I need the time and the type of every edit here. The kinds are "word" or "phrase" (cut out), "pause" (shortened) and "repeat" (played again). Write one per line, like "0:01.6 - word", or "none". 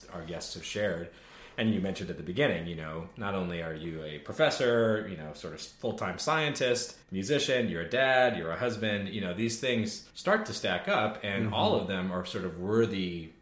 0:07.0 - pause
0:10.1 - pause